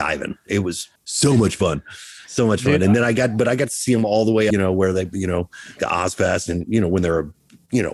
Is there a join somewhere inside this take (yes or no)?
yes